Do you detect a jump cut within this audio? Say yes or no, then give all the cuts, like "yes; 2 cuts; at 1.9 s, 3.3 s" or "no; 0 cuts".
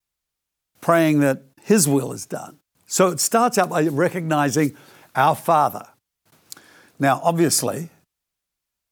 no; 0 cuts